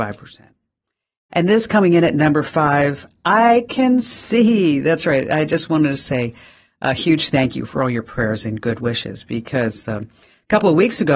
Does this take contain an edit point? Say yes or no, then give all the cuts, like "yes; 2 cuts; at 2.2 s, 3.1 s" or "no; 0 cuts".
no; 0 cuts